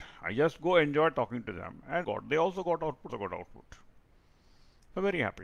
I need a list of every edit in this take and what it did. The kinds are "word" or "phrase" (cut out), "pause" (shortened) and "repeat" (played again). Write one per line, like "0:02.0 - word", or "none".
0:02.0 - word
0:03.1 - word